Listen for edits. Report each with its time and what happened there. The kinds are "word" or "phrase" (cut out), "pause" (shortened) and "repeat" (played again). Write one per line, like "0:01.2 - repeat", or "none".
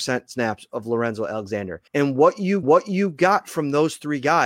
0:01.9 - pause
0:02.6 - repeat